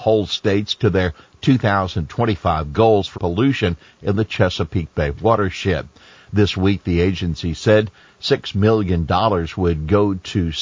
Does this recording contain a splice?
yes; 1 cut; at 3.1 s

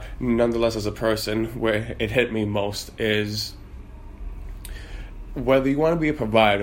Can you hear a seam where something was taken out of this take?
no; 0 cuts

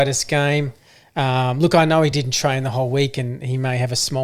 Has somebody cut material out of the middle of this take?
no; 0 cuts

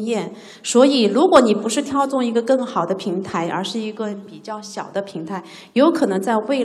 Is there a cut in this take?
no; 0 cuts

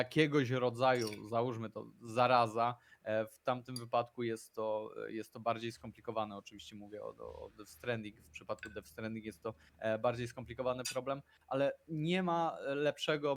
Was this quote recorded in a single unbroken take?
yes; 0 cuts

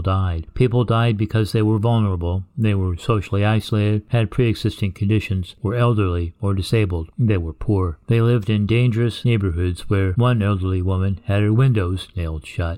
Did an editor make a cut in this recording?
no; 0 cuts

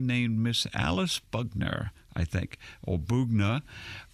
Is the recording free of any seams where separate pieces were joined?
yes; 0 cuts

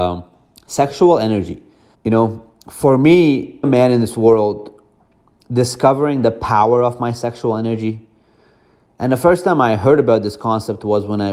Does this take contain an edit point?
yes; 3 cuts; at 1.9 s, 2.6 s, 3.6 s

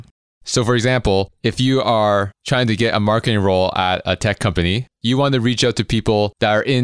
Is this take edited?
no; 0 cuts

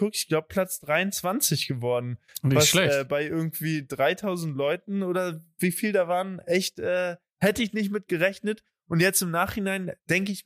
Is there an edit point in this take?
no; 0 cuts

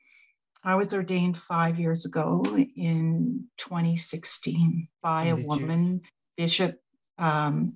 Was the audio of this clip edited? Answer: yes; 1 cut; at 4.9 s

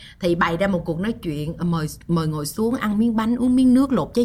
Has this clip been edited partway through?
no; 0 cuts

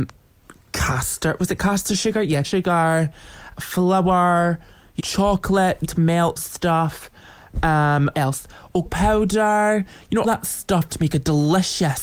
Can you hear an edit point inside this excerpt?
yes; 9 cuts; at 2.4 s, 3.6 s, 5.0 s, 5.8 s, 6.4 s, 8.1 s, 8.9 s, 10.2 s, 10.9 s

